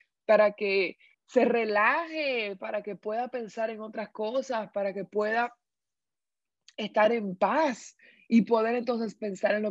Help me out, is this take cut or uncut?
cut